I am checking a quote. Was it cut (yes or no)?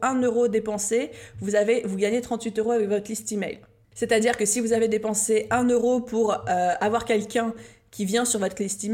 no